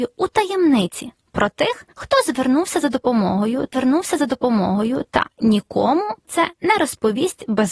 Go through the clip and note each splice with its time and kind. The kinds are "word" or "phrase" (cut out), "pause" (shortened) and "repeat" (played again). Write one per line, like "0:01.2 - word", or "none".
0:01.9 - pause
0:03.7 - repeat
0:06.2 - word